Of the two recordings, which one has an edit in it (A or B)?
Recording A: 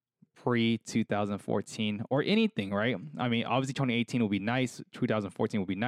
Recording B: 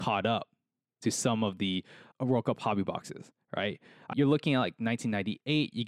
B